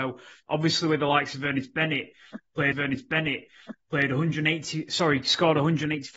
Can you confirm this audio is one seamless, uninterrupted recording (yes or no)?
no